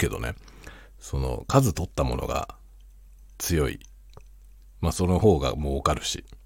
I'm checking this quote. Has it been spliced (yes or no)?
no